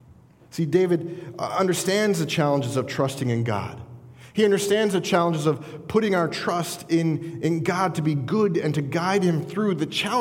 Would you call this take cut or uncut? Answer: uncut